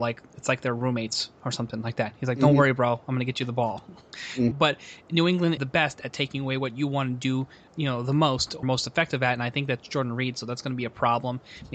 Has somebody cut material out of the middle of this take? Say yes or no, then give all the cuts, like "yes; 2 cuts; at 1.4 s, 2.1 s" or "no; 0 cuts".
yes; 4 cuts; at 4.5 s, 5.6 s, 7.7 s, 8.6 s